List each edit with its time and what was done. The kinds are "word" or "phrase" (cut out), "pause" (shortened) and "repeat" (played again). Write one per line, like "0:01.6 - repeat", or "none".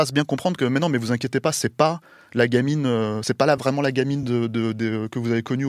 none